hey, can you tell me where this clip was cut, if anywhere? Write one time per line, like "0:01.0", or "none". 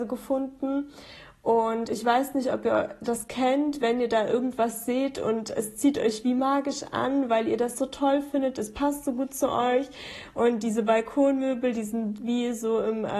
none